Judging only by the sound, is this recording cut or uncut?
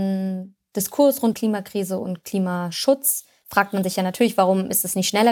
cut